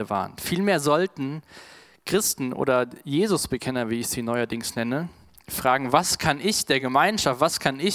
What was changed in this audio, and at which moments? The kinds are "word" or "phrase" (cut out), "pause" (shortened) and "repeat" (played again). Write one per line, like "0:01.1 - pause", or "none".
none